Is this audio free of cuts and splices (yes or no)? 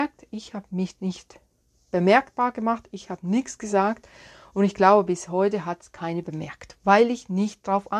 yes